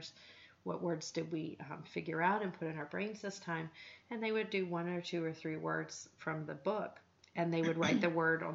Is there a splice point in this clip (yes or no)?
no